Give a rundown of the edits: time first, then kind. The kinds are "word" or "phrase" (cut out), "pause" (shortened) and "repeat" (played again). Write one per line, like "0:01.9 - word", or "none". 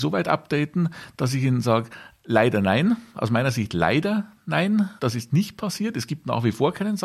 0:05.0 - pause